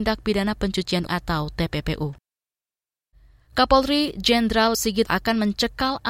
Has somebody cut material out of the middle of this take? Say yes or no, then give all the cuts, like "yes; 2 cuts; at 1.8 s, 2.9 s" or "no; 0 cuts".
yes; 3 cuts; at 1.1 s, 4.7 s, 5.1 s